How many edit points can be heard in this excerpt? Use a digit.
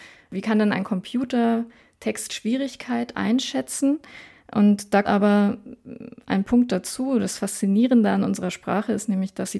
1